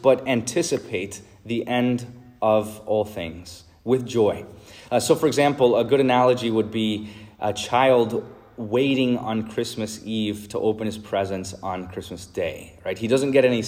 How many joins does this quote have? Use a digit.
0